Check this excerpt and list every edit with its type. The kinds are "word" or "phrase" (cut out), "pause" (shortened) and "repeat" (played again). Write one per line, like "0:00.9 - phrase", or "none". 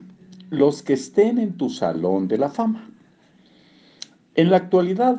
none